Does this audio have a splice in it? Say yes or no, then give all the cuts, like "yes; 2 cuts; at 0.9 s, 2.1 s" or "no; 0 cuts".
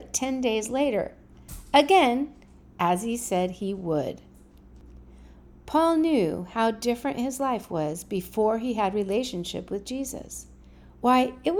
no; 0 cuts